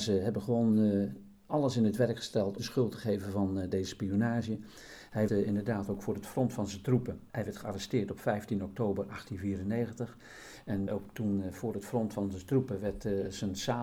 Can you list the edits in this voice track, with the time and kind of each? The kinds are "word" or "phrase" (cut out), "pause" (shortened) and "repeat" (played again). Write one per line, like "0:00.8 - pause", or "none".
0:02.6 - phrase
0:05.3 - word
0:07.3 - pause
0:10.9 - word